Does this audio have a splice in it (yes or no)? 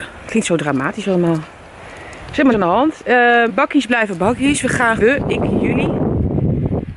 yes